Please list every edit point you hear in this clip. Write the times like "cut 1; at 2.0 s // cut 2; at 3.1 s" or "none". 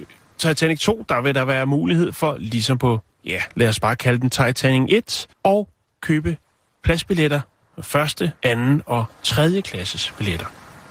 cut 1; at 5.3 s // cut 2; at 8.4 s